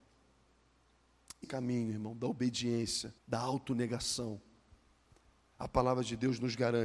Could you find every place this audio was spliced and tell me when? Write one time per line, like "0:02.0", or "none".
0:01.4
0:03.2

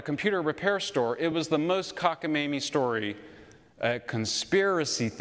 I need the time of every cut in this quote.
none

